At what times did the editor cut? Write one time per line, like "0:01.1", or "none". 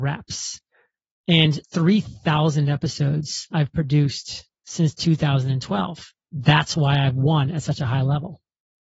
0:01.6